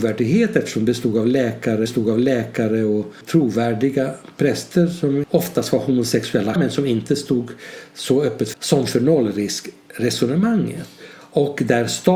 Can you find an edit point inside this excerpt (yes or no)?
yes